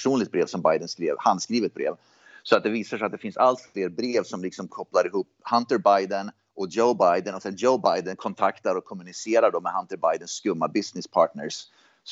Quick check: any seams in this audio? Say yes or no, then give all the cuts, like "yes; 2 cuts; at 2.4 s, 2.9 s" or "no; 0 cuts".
no; 0 cuts